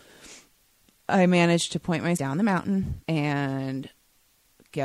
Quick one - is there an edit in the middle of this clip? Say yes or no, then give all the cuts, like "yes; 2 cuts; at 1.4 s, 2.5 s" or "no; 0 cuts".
yes; 2 cuts; at 2.2 s, 3.0 s